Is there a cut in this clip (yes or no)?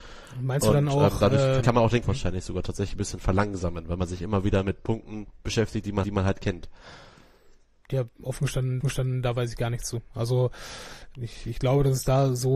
yes